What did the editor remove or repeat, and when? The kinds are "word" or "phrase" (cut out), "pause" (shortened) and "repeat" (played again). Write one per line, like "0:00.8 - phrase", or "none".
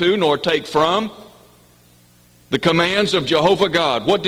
none